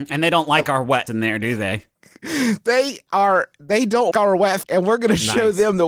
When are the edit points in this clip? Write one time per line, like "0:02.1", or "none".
0:01.1
0:04.1
0:04.6